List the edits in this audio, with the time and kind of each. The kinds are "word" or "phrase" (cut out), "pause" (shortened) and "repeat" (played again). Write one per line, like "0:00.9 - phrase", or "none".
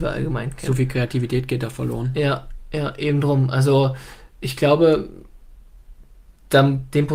none